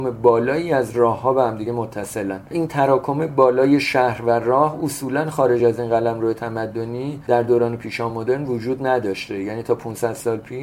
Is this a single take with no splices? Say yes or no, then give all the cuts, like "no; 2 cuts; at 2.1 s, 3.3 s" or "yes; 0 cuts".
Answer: yes; 0 cuts